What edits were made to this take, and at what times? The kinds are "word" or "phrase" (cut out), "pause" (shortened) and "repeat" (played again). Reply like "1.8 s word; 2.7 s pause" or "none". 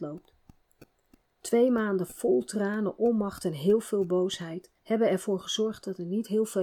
4.8 s pause